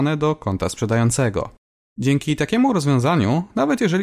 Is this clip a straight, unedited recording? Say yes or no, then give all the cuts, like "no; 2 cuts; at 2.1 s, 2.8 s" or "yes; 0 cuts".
yes; 0 cuts